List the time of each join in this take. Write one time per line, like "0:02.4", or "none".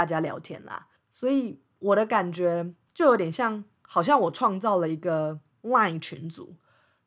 0:01.0